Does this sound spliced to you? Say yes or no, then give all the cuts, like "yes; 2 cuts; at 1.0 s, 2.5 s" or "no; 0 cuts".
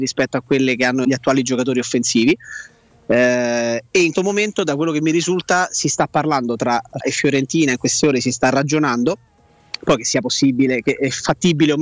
yes; 3 cuts; at 1.0 s, 4.1 s, 7.0 s